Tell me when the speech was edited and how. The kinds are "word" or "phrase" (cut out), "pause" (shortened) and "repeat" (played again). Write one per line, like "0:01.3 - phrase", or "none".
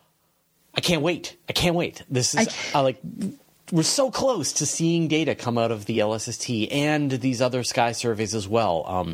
none